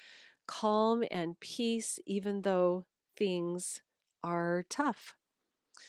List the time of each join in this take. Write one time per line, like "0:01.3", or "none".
none